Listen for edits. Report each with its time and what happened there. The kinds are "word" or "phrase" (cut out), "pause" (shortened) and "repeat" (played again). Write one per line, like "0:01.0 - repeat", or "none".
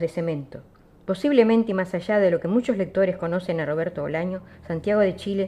none